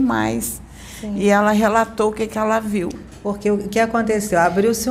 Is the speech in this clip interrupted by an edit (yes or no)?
no